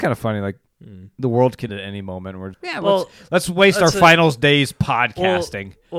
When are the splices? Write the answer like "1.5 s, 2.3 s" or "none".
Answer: 1.7 s, 2.5 s